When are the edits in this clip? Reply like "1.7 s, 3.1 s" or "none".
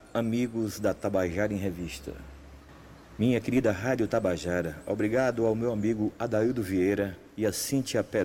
7.3 s

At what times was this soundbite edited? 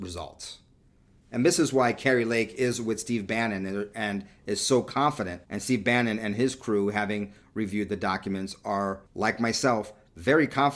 5.4 s, 9.1 s

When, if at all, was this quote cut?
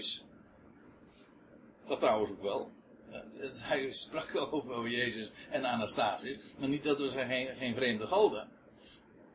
2.0 s

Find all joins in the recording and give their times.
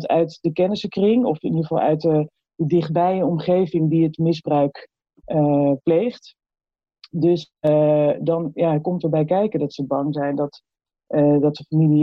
none

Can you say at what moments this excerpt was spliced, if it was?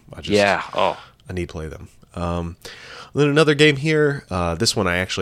1.5 s

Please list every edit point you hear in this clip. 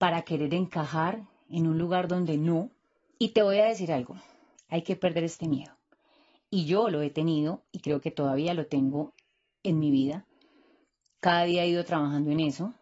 none

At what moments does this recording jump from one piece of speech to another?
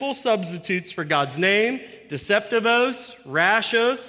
none

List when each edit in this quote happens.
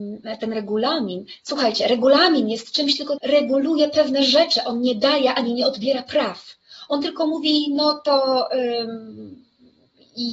3.2 s

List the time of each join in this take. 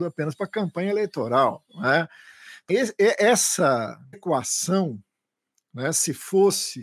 1.7 s, 2.7 s, 4.1 s

